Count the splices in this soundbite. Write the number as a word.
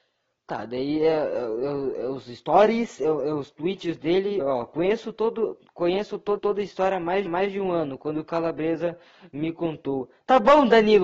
three